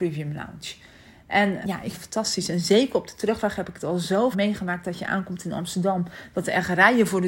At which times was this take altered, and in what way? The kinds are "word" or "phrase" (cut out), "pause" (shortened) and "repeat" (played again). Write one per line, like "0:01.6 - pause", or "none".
0:01.6 - word
0:01.9 - word
0:04.3 - word